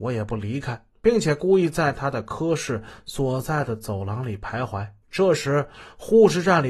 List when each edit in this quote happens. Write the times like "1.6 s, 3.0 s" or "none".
0.9 s, 5.0 s